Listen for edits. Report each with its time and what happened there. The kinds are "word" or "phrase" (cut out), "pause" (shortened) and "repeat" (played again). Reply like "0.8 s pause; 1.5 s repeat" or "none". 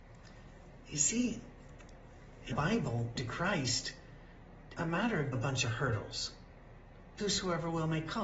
2.5 s word; 3.2 s word; 4.8 s word; 5.3 s word; 7.2 s word